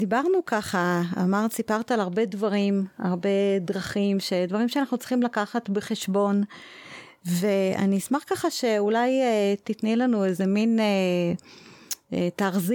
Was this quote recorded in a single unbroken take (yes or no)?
yes